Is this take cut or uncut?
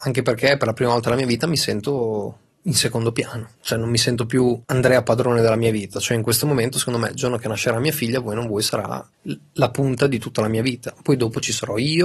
cut